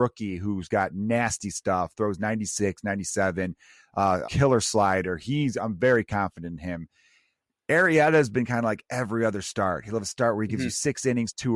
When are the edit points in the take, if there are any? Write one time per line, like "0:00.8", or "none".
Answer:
0:04.3

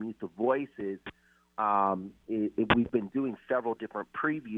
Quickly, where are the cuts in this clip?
none

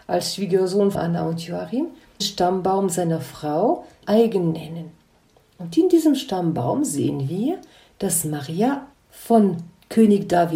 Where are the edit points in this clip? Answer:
0:00.9
0:02.2
0:04.0
0:08.9

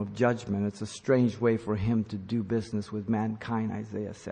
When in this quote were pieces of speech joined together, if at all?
none

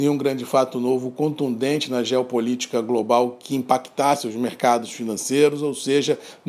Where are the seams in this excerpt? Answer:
none

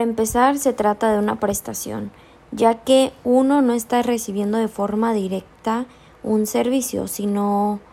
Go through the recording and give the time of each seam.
none

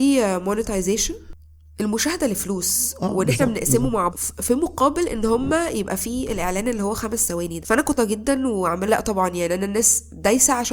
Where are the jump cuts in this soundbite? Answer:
0:04.1
0:07.6
0:08.0
0:08.9

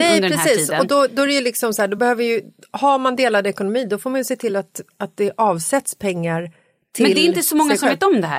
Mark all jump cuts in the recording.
none

